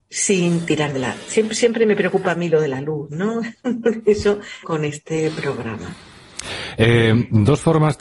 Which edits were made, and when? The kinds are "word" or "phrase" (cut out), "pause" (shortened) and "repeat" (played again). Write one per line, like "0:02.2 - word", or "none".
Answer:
0:04.6 - word